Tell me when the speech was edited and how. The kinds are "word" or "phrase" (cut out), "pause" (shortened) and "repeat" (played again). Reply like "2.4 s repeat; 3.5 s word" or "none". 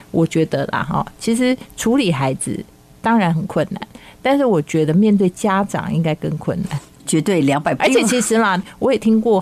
7.8 s word